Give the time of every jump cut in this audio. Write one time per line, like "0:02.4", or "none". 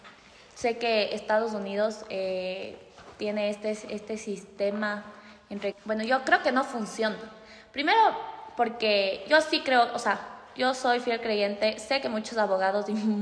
0:05.7